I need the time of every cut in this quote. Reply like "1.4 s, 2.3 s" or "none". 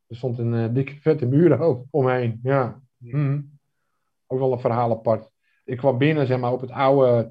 1.9 s